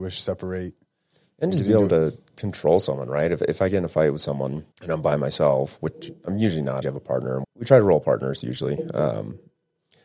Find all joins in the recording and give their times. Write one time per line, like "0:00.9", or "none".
0:04.7
0:06.8
0:07.4